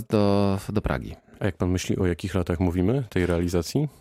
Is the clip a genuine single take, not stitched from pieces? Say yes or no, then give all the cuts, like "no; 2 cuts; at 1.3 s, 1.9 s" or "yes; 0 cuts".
yes; 0 cuts